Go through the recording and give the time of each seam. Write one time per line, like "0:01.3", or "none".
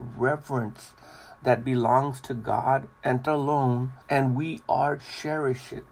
0:02.9
0:03.3
0:04.0
0:05.0